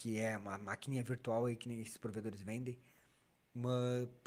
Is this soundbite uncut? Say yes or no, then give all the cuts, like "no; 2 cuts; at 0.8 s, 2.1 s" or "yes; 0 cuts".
yes; 0 cuts